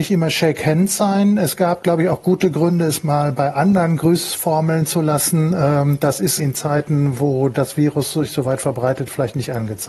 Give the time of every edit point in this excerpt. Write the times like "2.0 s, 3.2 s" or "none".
6.4 s